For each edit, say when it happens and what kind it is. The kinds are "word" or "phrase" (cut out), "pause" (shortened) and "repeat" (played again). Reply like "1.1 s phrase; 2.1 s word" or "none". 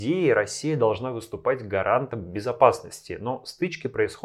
none